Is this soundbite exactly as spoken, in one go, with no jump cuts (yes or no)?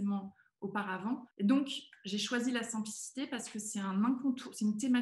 no